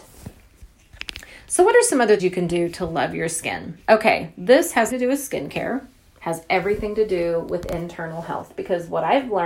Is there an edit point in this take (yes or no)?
yes